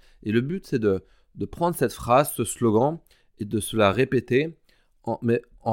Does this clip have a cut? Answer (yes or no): no